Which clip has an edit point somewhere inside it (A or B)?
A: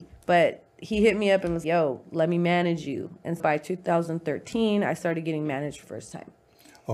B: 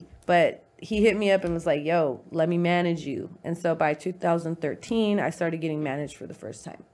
A